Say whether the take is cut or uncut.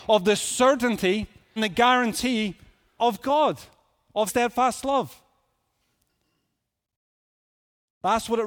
cut